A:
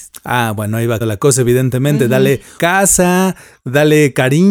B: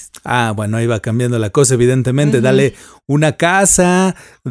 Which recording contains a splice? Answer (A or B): A